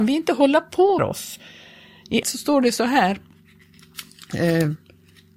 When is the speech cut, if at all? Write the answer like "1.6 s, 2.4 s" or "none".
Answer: 1.0 s, 2.2 s

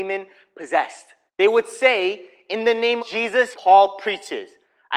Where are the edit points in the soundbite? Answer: 1.3 s, 3.0 s, 3.5 s

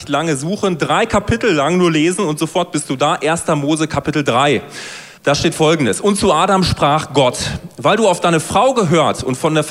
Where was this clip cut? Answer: 5.2 s

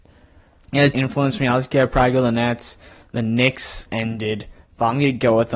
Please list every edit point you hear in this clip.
0.9 s, 3.9 s

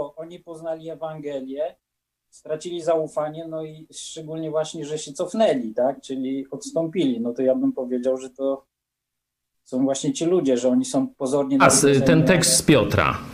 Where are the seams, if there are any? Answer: none

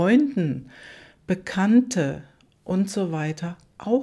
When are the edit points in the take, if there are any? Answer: none

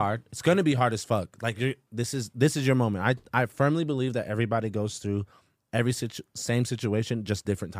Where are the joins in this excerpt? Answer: none

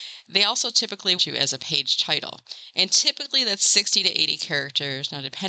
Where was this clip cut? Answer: 1.2 s

